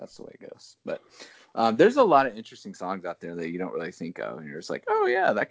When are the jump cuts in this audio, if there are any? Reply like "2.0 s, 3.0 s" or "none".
none